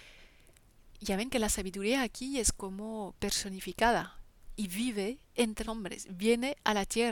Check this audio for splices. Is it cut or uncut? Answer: cut